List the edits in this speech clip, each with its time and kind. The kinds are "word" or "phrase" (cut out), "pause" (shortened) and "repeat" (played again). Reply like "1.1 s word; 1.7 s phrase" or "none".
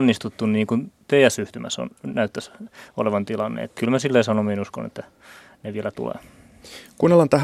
3.8 s word